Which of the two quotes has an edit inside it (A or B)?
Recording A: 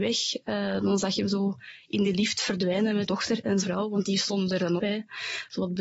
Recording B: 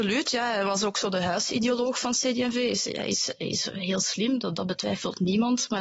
A